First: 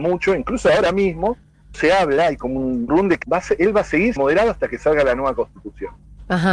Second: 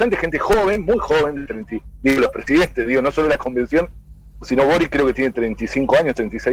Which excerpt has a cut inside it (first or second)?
first